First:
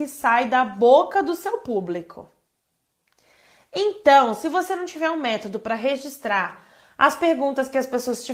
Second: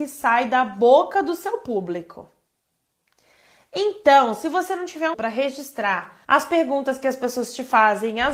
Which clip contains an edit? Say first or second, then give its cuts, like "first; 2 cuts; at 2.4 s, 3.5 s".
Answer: second; 2 cuts; at 5.1 s, 6.2 s